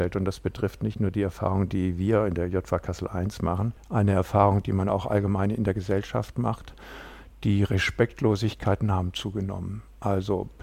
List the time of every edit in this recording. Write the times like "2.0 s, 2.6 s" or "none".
none